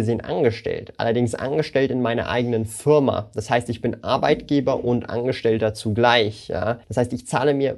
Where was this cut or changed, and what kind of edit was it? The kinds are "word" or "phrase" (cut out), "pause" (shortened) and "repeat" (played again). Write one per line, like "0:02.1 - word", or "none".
0:06.8 - pause